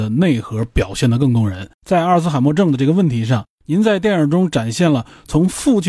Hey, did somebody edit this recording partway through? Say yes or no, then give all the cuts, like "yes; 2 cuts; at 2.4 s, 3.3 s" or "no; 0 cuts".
yes; 1 cut; at 1.7 s